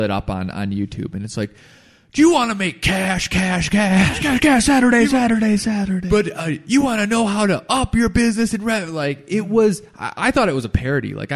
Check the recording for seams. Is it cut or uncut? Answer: uncut